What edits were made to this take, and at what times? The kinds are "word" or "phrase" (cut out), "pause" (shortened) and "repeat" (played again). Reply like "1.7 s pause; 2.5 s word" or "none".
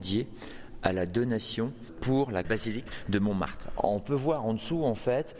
2.4 s phrase

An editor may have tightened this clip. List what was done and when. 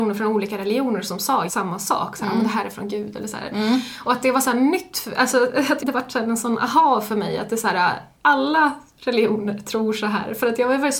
1.5 s word; 5.8 s word; 8.1 s pause

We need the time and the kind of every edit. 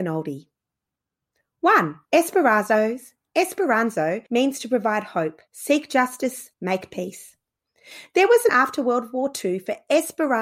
2.0 s pause; 4.3 s pause; 5.5 s pause; 6.5 s pause; 8.5 s word

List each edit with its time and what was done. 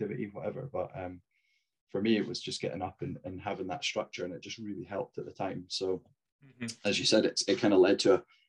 none

